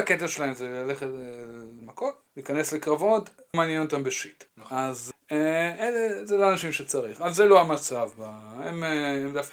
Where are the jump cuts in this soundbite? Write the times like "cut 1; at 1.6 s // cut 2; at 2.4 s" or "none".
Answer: cut 1; at 1.8 s // cut 2; at 2.3 s // cut 3; at 3.5 s // cut 4; at 4.5 s // cut 5; at 5.1 s